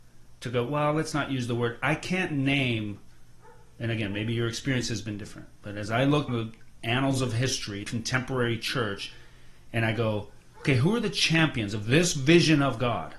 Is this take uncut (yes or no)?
no